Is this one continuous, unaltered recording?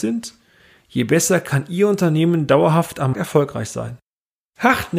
no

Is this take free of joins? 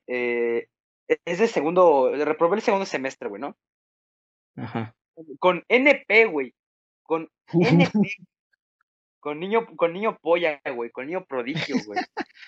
yes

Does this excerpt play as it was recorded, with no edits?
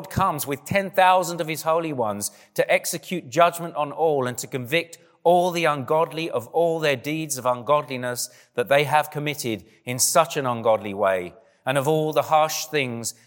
yes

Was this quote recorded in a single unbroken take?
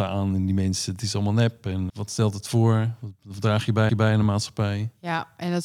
no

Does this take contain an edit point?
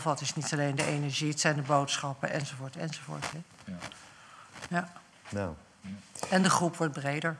no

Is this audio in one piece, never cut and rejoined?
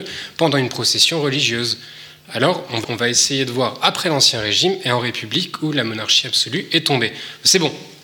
no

